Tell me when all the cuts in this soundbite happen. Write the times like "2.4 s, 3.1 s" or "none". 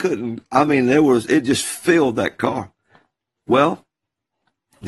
none